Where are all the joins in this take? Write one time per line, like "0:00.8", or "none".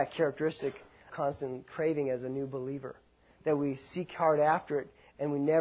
0:01.1